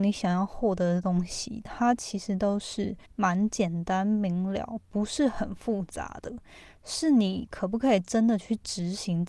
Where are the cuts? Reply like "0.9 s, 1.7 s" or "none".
3.0 s